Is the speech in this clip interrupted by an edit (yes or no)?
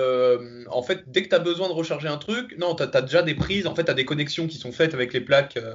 no